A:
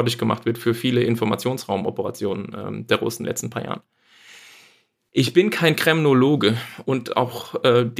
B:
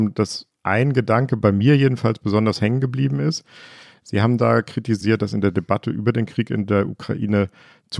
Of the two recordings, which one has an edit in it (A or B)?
A